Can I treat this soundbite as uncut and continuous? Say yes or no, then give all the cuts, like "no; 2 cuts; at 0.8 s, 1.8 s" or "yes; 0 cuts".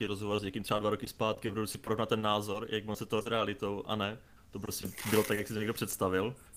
no; 2 cuts; at 3.2 s, 4.4 s